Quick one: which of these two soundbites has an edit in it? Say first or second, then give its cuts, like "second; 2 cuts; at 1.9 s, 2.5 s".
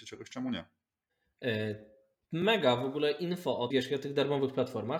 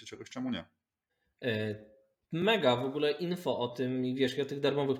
first; 1 cut; at 3.7 s